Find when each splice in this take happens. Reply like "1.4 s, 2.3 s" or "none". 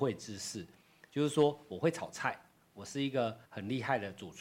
3.4 s